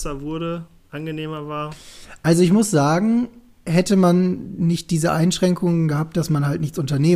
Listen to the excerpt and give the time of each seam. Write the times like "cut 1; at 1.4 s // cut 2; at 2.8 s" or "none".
none